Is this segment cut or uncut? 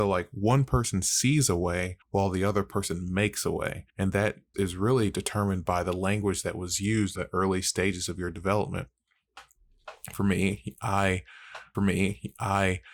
cut